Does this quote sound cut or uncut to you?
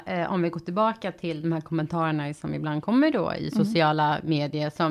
uncut